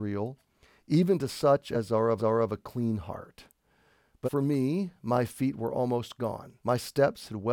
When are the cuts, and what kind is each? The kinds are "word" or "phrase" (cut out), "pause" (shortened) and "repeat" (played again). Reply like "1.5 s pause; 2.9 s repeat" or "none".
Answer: 2.2 s repeat; 4.2 s word; 6.6 s pause